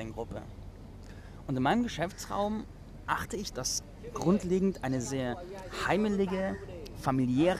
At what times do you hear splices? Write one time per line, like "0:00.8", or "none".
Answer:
0:03.5
0:05.0